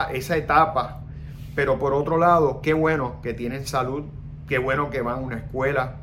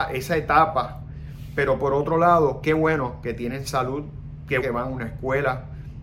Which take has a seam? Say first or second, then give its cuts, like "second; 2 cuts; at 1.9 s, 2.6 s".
second; 1 cut; at 4.6 s